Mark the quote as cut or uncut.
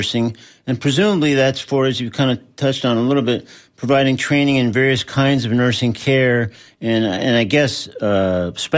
uncut